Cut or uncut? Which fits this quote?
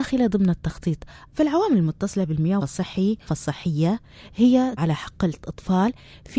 cut